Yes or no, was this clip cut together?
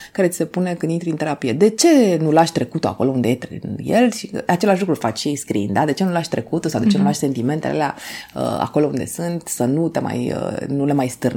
no